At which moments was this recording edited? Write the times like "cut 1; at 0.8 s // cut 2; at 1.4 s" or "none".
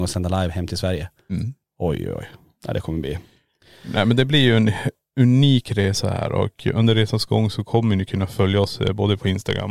none